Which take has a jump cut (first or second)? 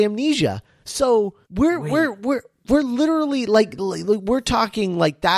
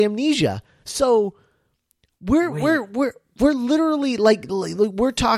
first